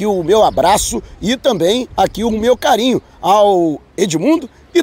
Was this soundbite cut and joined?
no; 0 cuts

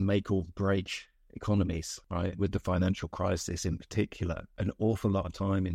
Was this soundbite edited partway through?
no; 0 cuts

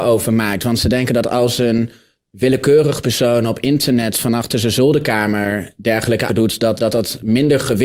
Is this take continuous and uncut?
no; 2 cuts; at 6.3 s, 6.8 s

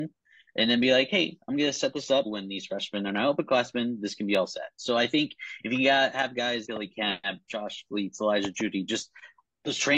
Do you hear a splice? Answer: yes; 2 cuts; at 2.3 s, 6.7 s

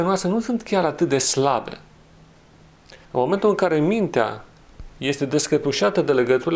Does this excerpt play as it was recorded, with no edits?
no; 1 cut; at 3.0 s

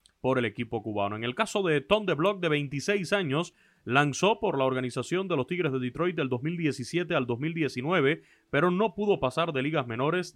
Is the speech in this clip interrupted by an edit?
no; 0 cuts

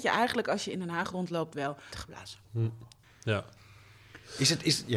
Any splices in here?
yes; 3 cuts; at 1.9 s, 2.4 s, 3.0 s

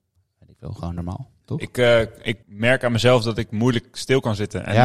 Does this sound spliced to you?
yes; 1 cut; at 2.4 s

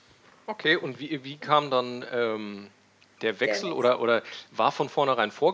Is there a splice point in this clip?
no; 0 cuts

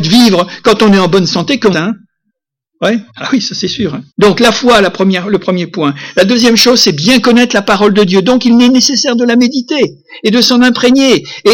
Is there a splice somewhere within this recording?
yes; 3 cuts; at 1.7 s, 3.1 s, 4.1 s

